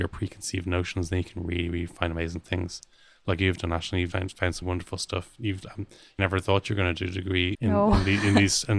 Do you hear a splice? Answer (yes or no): yes